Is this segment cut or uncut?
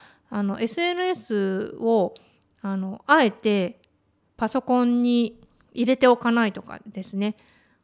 uncut